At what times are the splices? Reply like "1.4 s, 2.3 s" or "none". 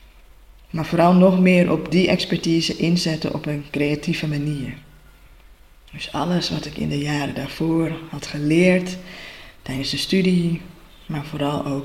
none